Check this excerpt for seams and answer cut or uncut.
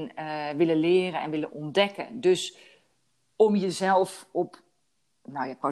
uncut